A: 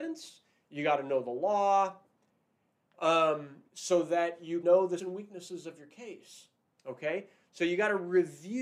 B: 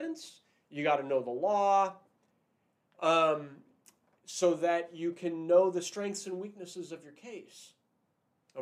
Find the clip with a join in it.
A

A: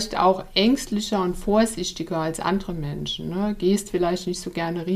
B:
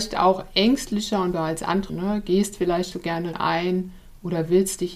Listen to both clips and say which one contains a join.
B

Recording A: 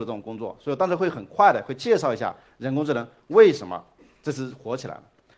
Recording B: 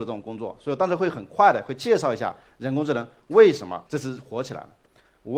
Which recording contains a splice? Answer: B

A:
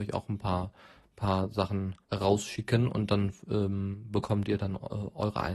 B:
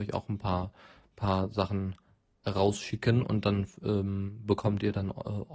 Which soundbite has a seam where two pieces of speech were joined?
A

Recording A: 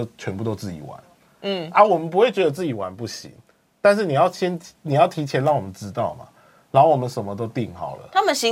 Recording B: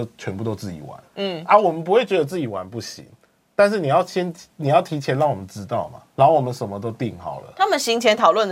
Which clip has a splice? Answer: B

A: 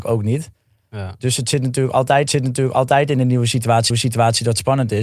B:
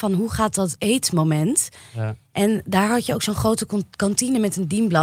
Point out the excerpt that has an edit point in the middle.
A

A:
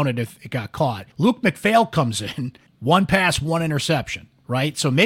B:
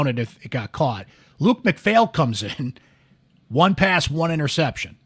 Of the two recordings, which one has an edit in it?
A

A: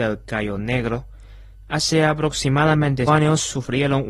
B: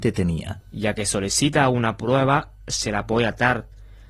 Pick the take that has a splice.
A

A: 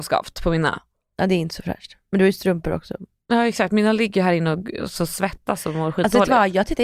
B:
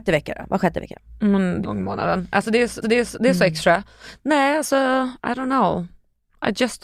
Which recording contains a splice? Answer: B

